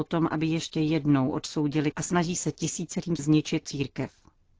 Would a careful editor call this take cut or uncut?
cut